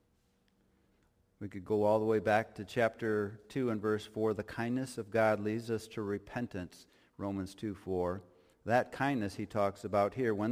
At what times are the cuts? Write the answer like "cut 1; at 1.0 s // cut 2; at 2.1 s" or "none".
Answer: none

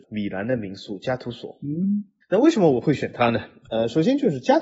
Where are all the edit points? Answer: none

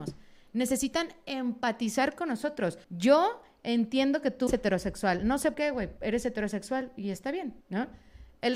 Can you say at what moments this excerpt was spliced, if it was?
cut 1; at 2.8 s // cut 2; at 4.5 s // cut 3; at 5.5 s // cut 4; at 6.0 s // cut 5; at 7.6 s

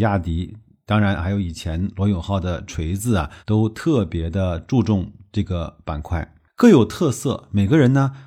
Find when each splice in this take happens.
cut 1; at 3.4 s

